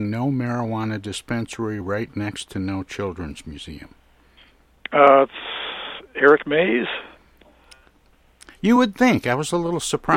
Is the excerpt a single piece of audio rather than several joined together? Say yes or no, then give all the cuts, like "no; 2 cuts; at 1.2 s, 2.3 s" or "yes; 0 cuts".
yes; 0 cuts